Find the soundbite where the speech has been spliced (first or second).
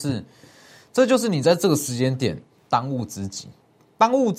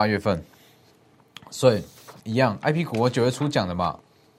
second